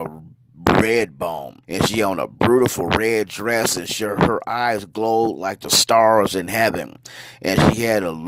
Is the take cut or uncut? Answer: cut